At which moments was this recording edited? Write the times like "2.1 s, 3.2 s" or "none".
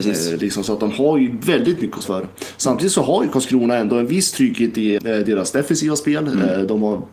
2.0 s, 5.0 s